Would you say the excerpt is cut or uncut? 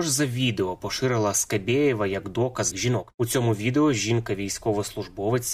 cut